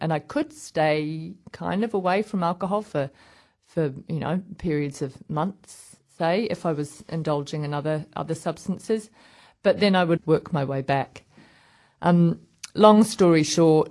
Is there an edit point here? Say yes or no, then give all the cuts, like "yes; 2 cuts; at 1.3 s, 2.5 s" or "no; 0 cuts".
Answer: yes; 1 cut; at 10.2 s